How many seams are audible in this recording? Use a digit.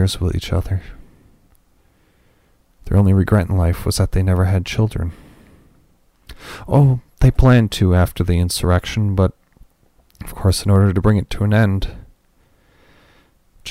0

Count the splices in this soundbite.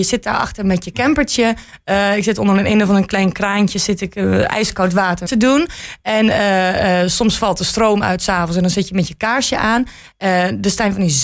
1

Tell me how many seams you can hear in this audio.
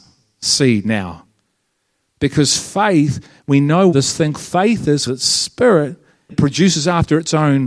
4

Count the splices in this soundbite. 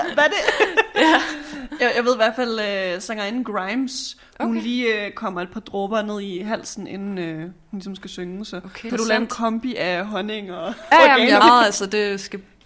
3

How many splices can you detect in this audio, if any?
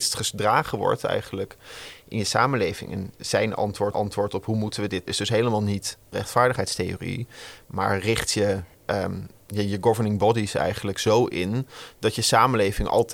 4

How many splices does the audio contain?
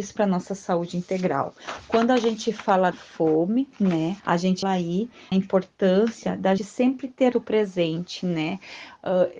6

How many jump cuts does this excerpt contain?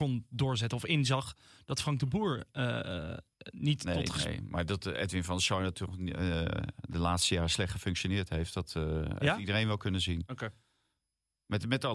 0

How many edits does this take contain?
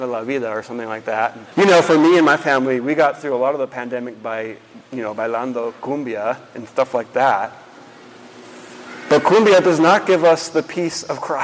1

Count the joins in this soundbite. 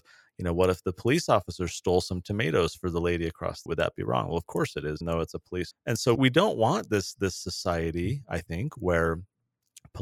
4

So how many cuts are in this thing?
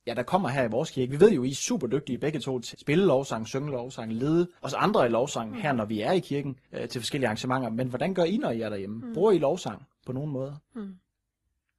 3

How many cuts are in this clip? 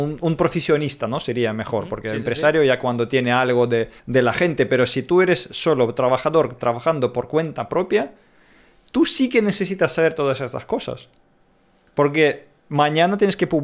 1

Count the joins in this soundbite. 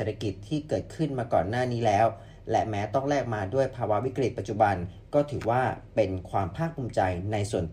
0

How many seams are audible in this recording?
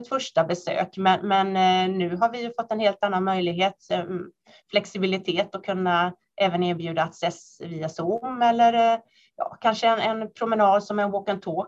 0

